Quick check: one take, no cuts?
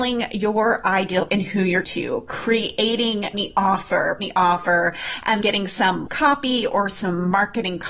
no; 6 cuts; at 1.3 s, 1.8 s, 3.3 s, 4.2 s, 5.4 s, 6.1 s

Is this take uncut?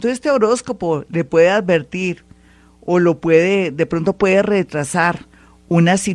yes; 0 cuts

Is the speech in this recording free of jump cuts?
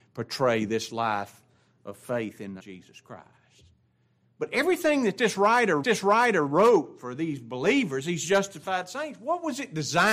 no; 2 cuts; at 2.6 s, 5.8 s

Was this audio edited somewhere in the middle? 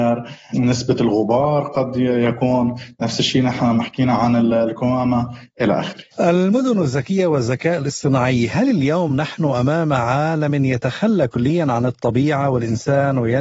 no; 0 cuts

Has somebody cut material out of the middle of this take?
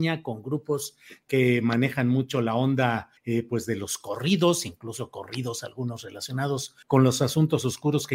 yes; 2 cuts; at 3.2 s, 6.8 s

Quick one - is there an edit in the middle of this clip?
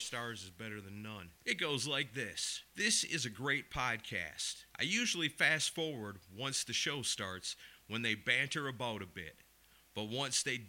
yes; 3 cuts; at 1.4 s, 2.7 s, 4.7 s

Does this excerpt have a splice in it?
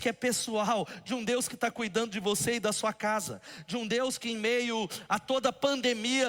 no; 0 cuts

